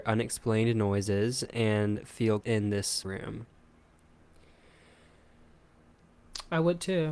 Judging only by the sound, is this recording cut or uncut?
cut